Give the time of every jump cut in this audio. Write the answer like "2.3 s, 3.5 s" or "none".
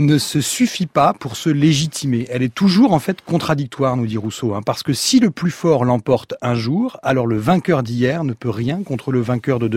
none